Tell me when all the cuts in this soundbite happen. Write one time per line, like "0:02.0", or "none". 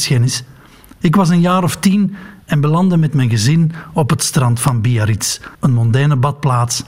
0:05.5